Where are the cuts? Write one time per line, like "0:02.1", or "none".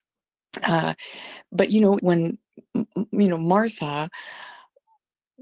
0:02.0